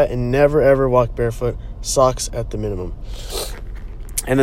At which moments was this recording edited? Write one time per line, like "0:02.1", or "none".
none